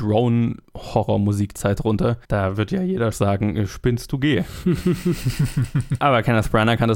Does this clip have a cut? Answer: yes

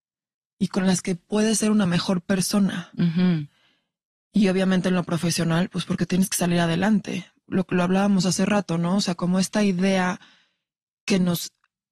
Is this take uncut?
yes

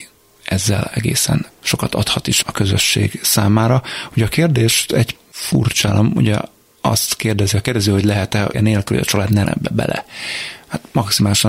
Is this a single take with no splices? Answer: no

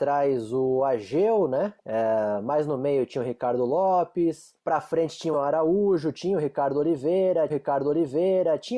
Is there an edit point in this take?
yes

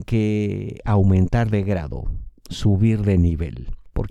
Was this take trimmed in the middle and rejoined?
no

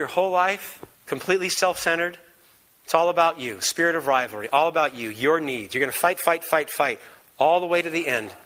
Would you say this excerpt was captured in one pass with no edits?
no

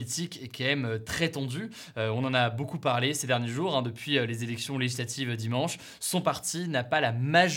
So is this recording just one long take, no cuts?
yes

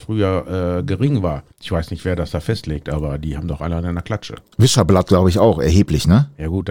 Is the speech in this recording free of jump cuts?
no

